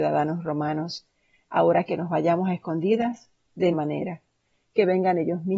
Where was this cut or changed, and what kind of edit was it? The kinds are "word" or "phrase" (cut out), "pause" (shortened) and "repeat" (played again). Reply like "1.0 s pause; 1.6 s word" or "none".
1.9 s word; 3.7 s word